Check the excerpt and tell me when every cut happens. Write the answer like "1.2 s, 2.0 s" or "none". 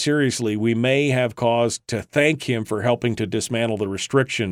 none